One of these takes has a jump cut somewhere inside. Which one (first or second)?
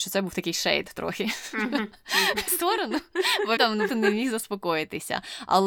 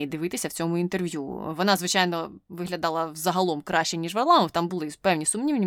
first